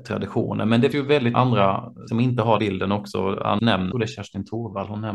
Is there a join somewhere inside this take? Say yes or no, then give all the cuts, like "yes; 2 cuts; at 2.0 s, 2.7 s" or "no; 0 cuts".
yes; 6 cuts; at 0.9 s, 1.3 s, 2.1 s, 2.6 s, 3.6 s, 3.9 s